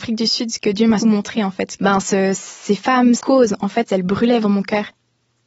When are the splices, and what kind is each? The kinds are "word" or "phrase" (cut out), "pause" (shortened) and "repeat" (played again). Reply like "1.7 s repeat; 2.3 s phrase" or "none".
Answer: 1.0 s word; 1.8 s word; 3.2 s word; 4.4 s word